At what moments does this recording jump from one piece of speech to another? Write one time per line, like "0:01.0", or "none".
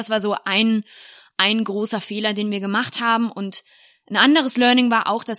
none